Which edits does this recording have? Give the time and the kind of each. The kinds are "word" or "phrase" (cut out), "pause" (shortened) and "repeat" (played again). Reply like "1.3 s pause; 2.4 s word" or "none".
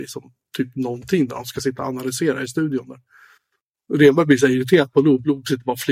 none